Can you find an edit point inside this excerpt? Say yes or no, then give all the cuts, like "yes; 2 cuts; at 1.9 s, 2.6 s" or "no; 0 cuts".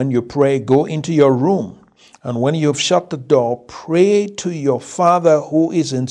no; 0 cuts